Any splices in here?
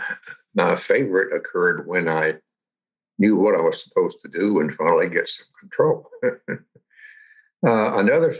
no; 0 cuts

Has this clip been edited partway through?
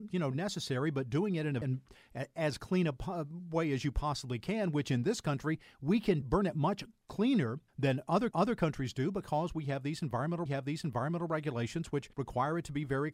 yes; 6 cuts; at 1.6 s, 6.2 s, 7.7 s, 8.3 s, 10.5 s, 12.1 s

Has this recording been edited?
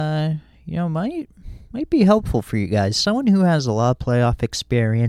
no; 0 cuts

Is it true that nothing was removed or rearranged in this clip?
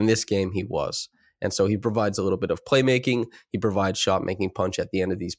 yes; 0 cuts

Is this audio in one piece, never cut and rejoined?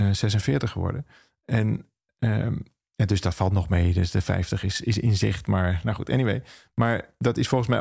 yes; 0 cuts

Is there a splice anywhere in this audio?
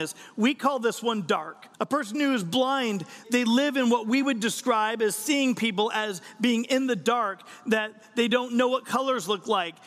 yes; 2 cuts; at 1.7 s, 3.2 s

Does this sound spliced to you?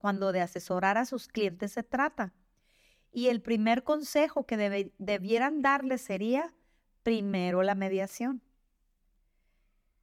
no; 0 cuts

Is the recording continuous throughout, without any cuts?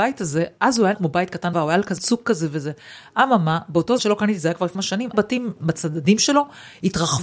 no; 6 cuts; at 0.9 s, 1.5 s, 2.0 s, 4.0 s, 4.7 s, 5.1 s

